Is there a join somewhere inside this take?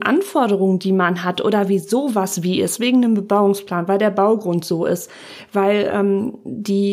no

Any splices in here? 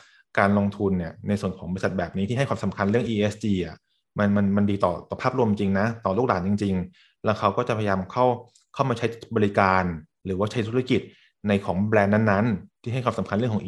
no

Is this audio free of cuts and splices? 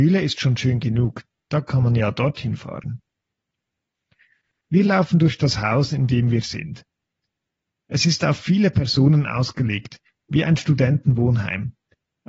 yes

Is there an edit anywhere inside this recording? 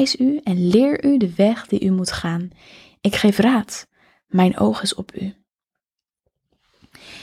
no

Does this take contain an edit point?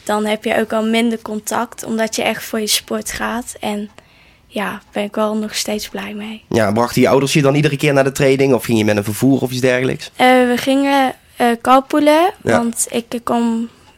no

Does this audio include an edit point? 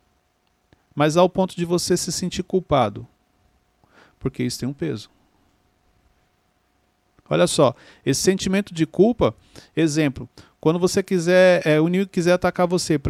no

